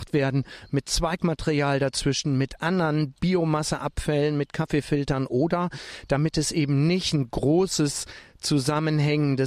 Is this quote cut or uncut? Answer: cut